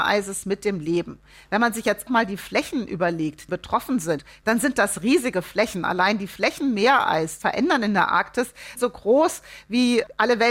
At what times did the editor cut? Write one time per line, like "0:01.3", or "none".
0:02.1
0:03.5
0:07.4
0:08.8